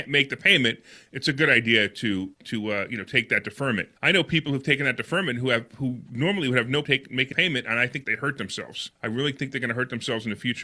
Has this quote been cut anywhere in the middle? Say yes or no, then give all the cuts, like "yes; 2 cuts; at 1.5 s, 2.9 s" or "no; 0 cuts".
yes; 6 cuts; at 2.3 s, 4.0 s, 6.8 s, 7.3 s, 8.0 s, 9.0 s